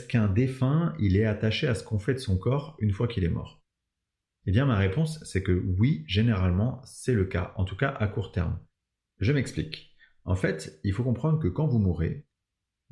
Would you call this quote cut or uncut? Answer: uncut